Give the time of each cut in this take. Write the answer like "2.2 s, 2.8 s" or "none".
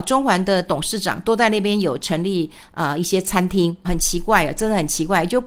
3.8 s